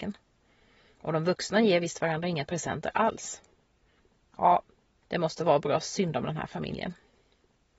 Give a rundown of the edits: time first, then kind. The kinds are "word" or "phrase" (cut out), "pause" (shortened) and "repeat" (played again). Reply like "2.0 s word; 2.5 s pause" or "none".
none